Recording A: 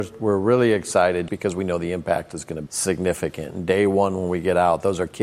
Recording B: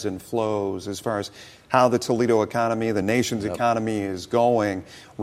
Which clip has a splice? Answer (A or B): A